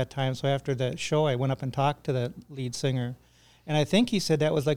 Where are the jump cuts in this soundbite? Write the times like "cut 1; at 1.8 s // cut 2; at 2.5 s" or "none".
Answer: none